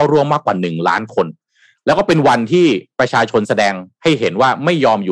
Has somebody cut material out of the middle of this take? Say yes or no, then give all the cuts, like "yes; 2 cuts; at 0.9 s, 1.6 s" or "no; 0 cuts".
no; 0 cuts